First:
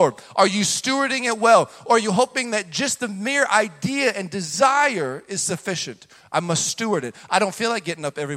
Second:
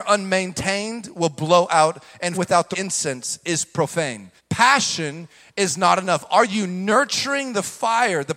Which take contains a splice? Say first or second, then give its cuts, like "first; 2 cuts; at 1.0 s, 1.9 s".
second; 3 cuts; at 2.3 s, 2.7 s, 4.4 s